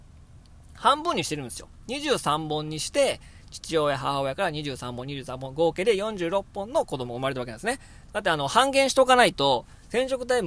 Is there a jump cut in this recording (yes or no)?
no